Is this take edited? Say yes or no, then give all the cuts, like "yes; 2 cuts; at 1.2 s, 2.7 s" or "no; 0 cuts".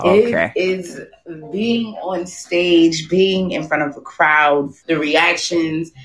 yes; 1 cut; at 4.8 s